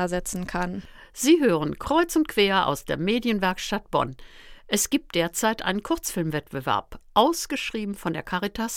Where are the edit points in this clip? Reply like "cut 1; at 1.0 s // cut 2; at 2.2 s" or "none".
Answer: none